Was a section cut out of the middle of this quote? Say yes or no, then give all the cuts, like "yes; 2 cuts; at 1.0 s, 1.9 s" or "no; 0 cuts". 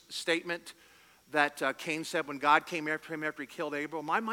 no; 0 cuts